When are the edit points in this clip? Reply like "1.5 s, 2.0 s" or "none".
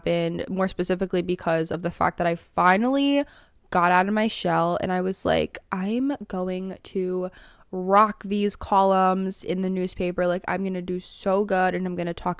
none